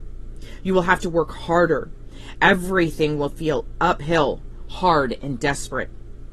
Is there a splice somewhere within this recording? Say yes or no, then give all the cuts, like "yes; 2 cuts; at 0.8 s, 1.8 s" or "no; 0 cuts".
no; 0 cuts